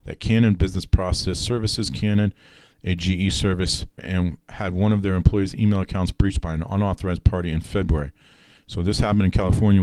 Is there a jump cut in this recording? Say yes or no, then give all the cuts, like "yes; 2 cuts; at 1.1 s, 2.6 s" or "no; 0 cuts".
yes; 1 cut; at 4.0 s